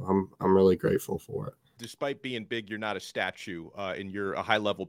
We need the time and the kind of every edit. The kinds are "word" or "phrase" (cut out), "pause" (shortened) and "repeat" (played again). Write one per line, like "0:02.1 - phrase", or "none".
0:01.8 - word

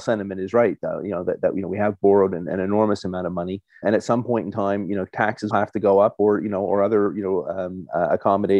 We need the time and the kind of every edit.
0:03.8 - word
0:05.5 - word

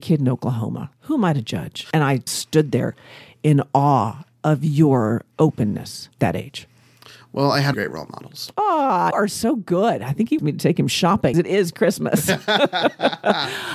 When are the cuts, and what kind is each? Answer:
0:02.3 - word
0:06.2 - word
0:07.7 - word
0:09.1 - word
0:10.4 - word
0:11.3 - word

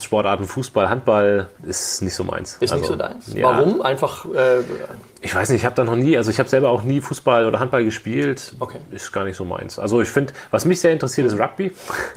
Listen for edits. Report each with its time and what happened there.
0:01.5 - pause

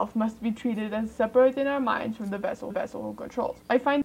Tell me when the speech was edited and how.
0:02.7 - repeat

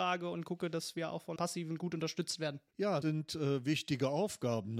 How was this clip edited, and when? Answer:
0:01.4 - word
0:03.0 - word

